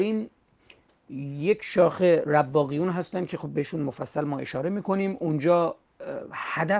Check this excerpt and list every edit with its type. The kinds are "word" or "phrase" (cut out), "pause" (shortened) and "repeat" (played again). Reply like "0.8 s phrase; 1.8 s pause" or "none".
none